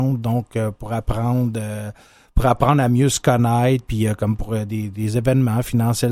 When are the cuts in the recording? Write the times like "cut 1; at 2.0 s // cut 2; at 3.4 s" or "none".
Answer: none